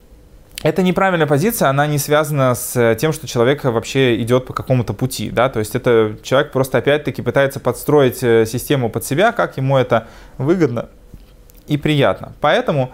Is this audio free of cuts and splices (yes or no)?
yes